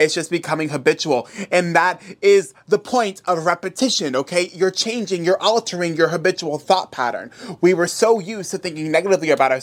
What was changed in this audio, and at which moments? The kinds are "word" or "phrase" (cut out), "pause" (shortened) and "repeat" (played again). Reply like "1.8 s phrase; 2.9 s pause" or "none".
none